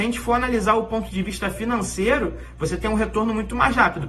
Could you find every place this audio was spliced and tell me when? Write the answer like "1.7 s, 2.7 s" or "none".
none